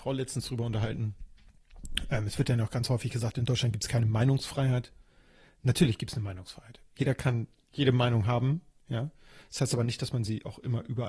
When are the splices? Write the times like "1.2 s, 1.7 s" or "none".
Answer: none